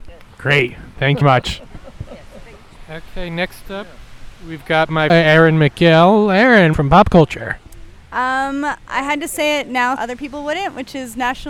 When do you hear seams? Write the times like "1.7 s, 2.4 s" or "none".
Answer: 1.2 s, 5.1 s, 6.7 s, 10.0 s